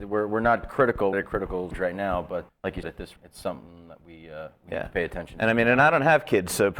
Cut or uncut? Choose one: cut